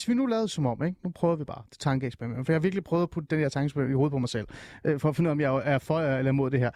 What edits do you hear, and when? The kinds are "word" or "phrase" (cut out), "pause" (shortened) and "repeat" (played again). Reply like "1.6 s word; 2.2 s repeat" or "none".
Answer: none

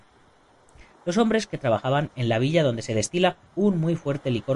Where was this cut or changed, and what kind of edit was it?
3.5 s pause

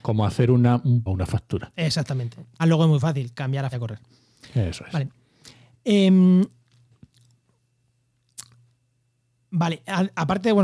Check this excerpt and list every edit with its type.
1.1 s word; 2.6 s word; 3.7 s word

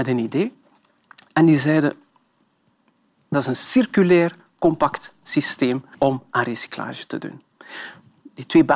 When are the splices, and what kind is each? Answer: 3.3 s phrase; 5.9 s pause

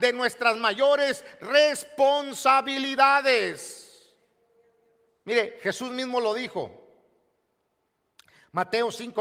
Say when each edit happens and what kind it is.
none

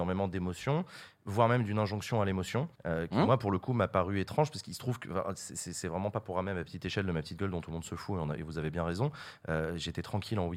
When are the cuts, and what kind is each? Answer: 2.7 s pause

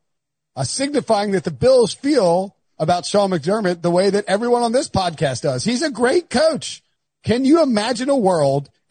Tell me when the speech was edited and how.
none

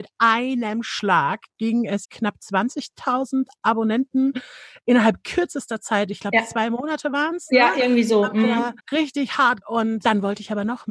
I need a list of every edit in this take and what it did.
2.0 s phrase; 8.8 s pause; 9.6 s word

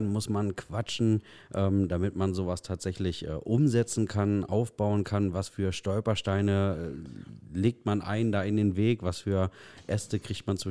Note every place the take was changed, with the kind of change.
none

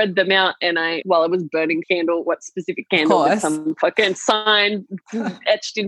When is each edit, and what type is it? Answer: 1.0 s word; 1.8 s word

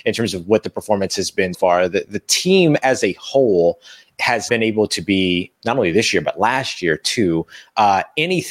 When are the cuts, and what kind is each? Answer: 1.5 s word; 4.5 s word

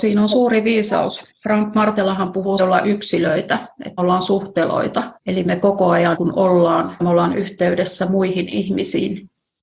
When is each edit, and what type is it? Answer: 1.3 s pause; 2.6 s phrase; 4.0 s word; 5.2 s pause; 6.2 s word; 7.0 s word

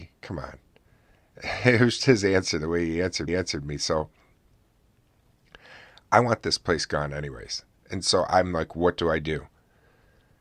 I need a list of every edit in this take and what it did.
2.0 s word; 3.3 s repeat

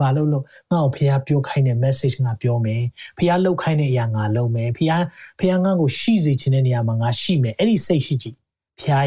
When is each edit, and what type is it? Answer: none

